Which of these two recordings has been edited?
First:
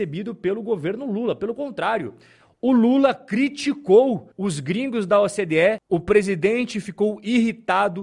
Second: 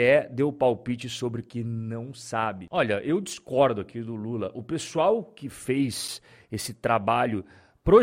first; 1 cut; at 4.3 s

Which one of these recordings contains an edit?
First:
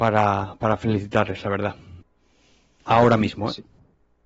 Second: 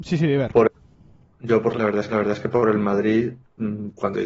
second; 2 cuts; at 1.7 s, 2.1 s

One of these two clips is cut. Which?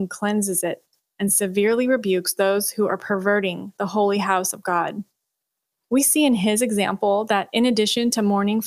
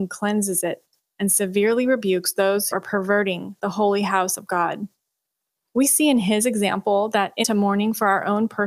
second; 2 cuts; at 2.7 s, 7.4 s

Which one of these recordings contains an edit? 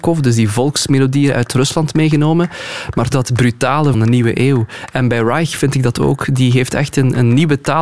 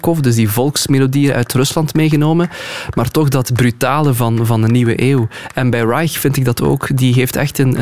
first; 2 cuts; at 3.1 s, 3.9 s

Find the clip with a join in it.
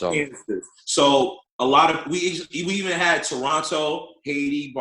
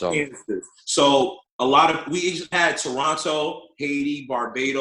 second; 1 cut; at 2.5 s

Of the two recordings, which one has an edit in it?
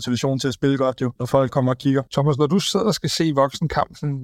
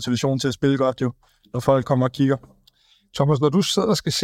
first; 2 cuts; at 1.2 s, 2.1 s

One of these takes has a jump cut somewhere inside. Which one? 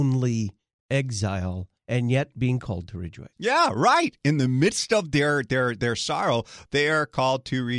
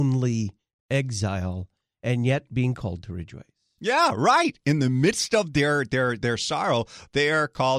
first; 2 cuts; at 1.8 s, 3.3 s

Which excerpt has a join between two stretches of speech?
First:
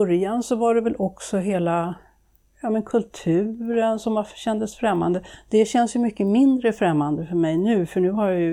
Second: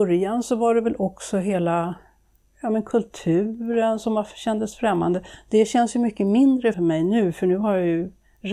second; 1 cut; at 6.7 s

